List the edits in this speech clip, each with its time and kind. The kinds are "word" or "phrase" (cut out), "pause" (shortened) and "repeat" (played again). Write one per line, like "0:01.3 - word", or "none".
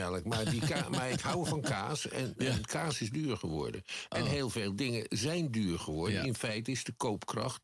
none